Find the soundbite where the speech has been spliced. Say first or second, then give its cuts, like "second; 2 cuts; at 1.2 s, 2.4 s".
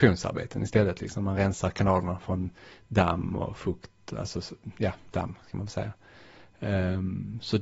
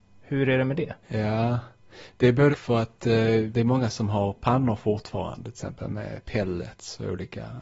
second; 3 cuts; at 1.0 s, 2.5 s, 3.5 s